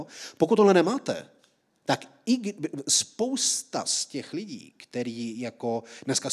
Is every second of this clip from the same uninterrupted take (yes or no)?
yes